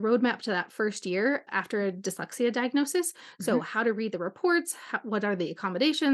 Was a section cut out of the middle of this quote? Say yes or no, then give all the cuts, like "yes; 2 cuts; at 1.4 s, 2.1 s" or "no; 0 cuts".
yes; 1 cut; at 1.5 s